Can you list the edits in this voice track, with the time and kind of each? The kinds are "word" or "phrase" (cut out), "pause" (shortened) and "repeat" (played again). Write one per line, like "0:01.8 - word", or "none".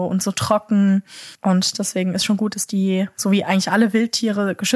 0:01.3 - pause

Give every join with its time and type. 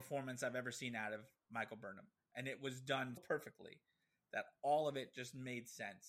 0:03.2 - word

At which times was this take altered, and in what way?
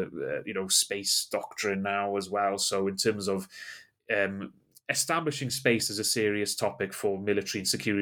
none

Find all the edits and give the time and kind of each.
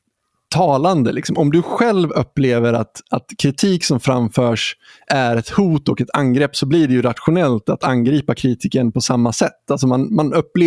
none

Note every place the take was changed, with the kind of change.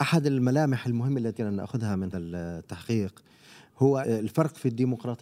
0:01.4 - word
0:02.1 - word
0:04.0 - word

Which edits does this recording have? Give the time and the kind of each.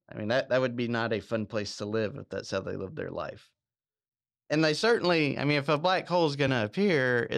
none

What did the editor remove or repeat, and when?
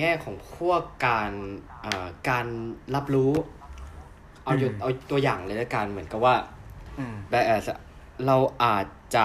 0:07.3 - word

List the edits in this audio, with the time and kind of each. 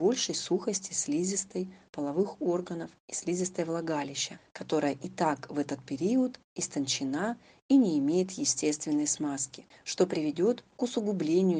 none

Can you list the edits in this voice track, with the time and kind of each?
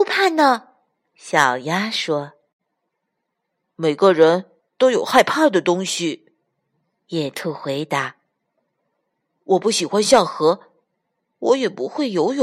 none

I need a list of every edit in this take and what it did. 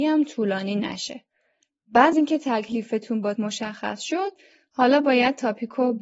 0:02.1 - word
0:03.4 - word

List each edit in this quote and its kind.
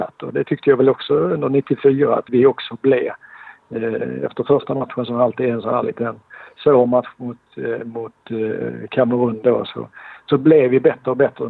0:02.3 - word

